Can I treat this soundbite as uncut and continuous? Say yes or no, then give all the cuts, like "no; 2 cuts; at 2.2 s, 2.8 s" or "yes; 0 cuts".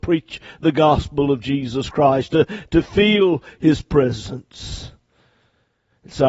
yes; 0 cuts